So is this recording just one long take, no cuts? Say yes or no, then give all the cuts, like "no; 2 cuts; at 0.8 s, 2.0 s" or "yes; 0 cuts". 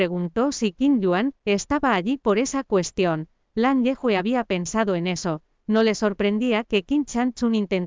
yes; 0 cuts